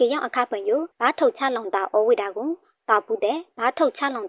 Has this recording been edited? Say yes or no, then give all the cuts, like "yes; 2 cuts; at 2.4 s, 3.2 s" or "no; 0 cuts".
yes; 1 cut; at 0.9 s